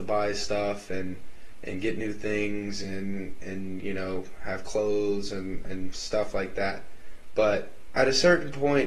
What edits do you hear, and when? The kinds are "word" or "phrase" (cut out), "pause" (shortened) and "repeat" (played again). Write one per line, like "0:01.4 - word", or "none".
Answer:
none